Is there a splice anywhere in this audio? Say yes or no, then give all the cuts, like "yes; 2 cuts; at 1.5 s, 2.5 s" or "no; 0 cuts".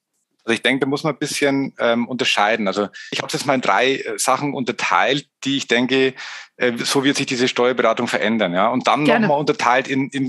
no; 0 cuts